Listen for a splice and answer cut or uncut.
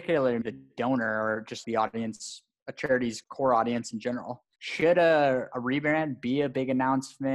cut